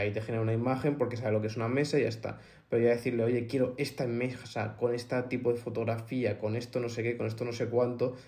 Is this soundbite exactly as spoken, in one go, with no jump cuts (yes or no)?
yes